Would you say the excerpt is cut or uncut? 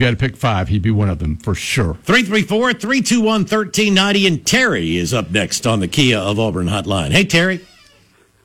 cut